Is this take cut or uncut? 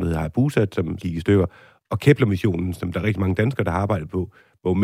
cut